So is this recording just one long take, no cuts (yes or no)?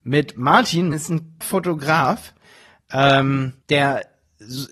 no